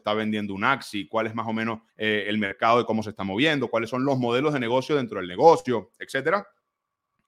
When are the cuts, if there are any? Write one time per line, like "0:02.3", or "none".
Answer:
0:01.9